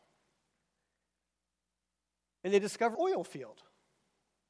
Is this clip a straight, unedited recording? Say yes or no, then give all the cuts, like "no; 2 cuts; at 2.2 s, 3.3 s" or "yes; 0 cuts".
no; 1 cut; at 2.9 s